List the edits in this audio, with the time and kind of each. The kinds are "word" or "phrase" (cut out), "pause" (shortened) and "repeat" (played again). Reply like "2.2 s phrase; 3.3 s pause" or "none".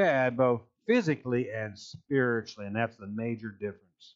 none